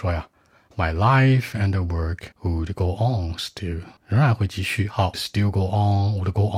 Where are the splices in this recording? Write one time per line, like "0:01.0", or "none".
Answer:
0:02.3
0:04.0
0:05.1